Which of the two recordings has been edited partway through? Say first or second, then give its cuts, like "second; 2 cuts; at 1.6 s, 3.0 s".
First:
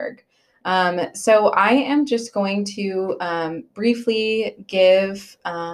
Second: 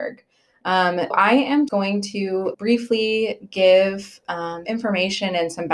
second; 4 cuts; at 1.1 s, 1.7 s, 2.5 s, 4.6 s